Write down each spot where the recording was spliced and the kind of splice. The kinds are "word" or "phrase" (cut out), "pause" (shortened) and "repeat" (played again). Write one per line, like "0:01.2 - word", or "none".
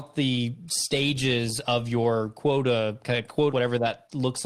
0:03.5 - word